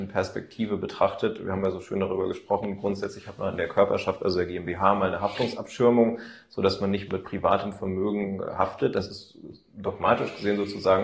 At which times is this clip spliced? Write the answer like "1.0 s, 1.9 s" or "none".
7.1 s